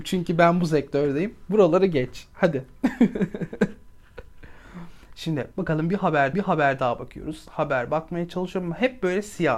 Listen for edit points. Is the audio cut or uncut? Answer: cut